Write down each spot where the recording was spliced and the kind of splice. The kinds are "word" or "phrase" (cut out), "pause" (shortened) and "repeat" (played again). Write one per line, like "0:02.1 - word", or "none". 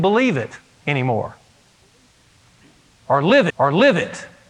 0:03.5 - repeat